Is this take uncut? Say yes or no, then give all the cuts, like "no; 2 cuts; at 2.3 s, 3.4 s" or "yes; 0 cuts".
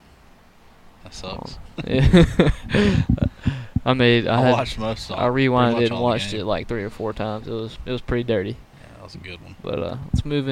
yes; 0 cuts